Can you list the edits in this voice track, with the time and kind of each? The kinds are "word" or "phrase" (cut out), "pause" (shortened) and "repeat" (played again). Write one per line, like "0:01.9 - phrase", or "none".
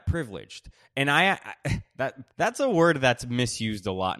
0:02.3 - pause